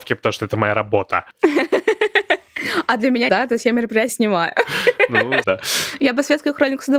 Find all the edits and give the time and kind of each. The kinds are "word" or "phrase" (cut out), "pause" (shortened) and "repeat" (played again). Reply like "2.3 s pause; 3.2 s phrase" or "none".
3.3 s word; 4.1 s word; 5.4 s word